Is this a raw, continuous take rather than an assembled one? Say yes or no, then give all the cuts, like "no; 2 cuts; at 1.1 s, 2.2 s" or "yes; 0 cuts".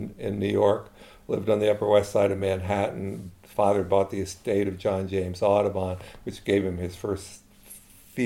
yes; 0 cuts